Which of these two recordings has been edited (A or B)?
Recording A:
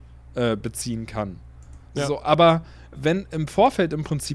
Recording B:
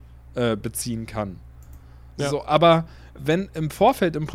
A